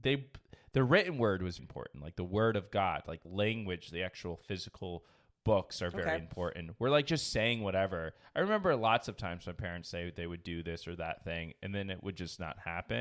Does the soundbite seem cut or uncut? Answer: cut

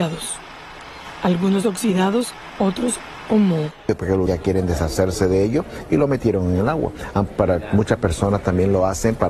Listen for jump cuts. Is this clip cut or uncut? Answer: cut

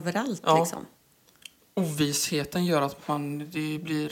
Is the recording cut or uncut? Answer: cut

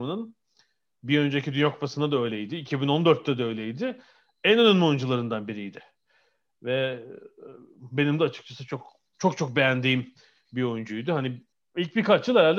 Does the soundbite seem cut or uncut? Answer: uncut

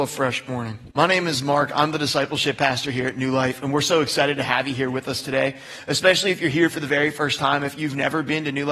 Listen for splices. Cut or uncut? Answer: cut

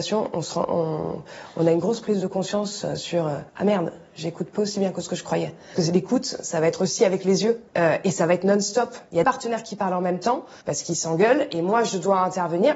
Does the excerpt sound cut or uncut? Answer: cut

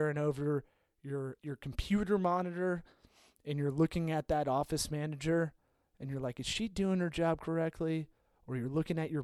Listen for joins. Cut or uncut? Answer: cut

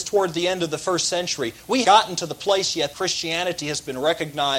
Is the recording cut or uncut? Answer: cut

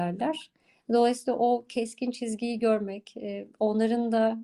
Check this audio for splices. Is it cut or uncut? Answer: uncut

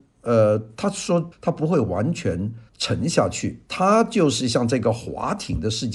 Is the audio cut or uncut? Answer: cut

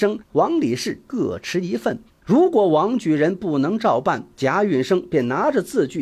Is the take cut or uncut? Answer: cut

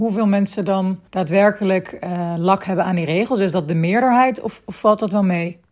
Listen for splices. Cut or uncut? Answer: cut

